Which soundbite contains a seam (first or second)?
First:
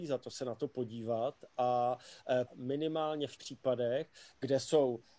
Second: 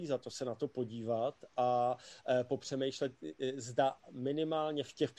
first